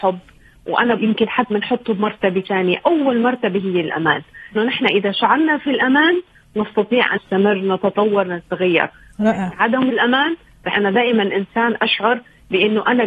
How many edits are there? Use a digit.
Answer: 6